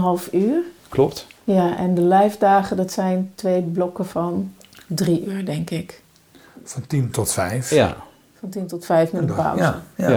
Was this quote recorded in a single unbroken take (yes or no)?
yes